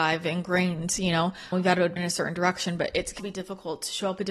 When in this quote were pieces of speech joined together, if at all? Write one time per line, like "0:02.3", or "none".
0:01.5
0:02.0
0:03.2